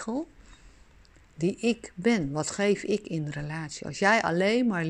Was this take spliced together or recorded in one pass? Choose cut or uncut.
uncut